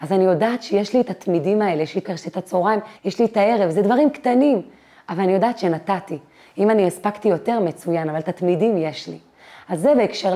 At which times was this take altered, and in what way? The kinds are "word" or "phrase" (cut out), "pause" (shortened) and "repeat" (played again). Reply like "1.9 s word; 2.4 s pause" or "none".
2.0 s word; 3.0 s pause